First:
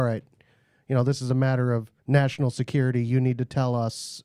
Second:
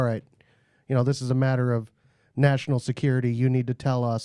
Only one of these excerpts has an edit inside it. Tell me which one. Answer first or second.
first